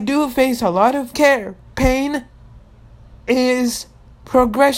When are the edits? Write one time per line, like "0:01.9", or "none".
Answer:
0:01.1